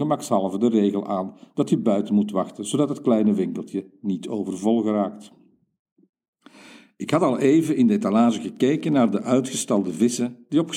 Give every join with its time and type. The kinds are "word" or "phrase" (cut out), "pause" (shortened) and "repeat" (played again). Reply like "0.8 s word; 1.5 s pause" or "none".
none